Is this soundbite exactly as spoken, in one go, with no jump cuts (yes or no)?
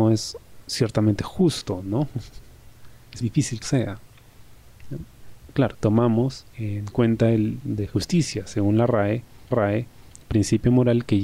no